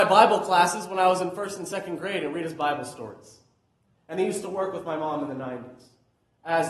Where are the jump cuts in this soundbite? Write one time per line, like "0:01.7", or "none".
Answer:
none